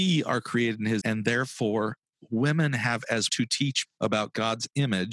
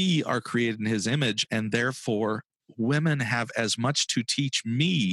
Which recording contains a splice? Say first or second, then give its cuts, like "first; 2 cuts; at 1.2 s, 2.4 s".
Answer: first; 3 cuts; at 1.0 s, 3.3 s, 3.8 s